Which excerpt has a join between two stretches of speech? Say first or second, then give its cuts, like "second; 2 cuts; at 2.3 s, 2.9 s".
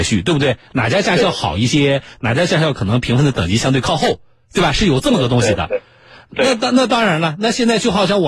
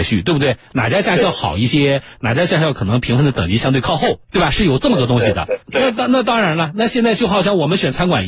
second; 2 cuts; at 4.2 s, 5.6 s